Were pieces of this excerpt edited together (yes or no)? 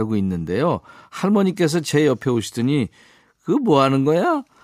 no